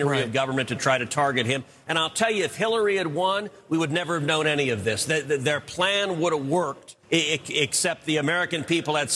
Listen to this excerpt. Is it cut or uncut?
cut